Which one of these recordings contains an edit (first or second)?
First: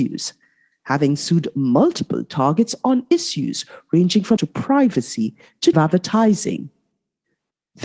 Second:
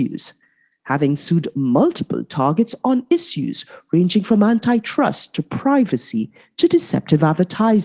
first